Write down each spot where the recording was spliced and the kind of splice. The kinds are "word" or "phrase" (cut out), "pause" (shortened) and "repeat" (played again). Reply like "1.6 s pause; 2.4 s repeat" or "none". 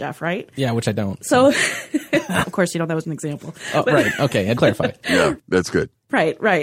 2.4 s word; 3.0 s word; 4.6 s phrase